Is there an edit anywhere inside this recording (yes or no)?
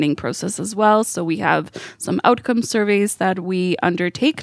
no